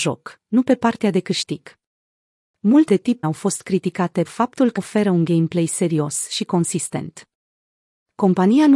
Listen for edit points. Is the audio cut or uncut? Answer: cut